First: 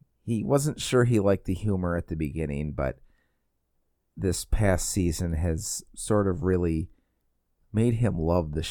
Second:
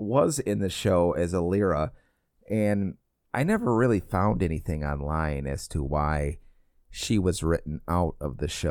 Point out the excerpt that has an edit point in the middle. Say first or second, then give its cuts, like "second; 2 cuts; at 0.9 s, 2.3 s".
second; 1 cut; at 3.2 s